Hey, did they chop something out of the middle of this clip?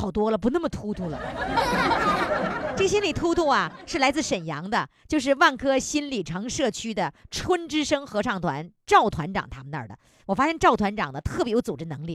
no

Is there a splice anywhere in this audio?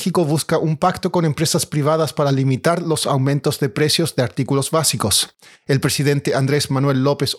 no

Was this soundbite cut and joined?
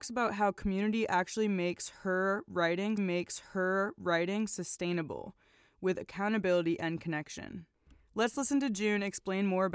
yes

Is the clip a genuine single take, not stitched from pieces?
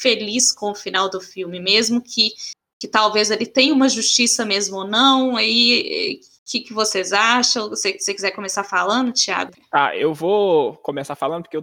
yes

